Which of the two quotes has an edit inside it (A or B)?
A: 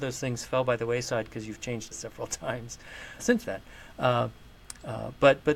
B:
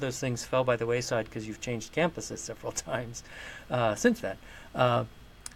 A